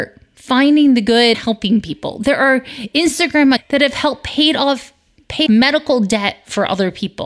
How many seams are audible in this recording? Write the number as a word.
three